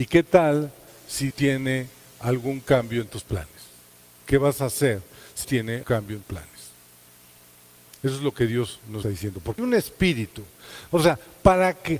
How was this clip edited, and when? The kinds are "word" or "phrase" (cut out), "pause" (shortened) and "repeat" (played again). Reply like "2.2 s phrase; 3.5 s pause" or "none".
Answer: 1.3 s word; 5.4 s word; 5.8 s word; 6.2 s word; 9.0 s word; 9.6 s word